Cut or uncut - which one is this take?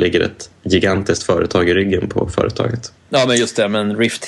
uncut